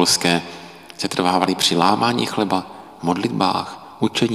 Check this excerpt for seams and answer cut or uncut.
uncut